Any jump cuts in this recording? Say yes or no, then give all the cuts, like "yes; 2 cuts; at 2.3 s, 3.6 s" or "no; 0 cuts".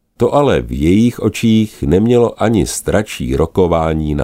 no; 0 cuts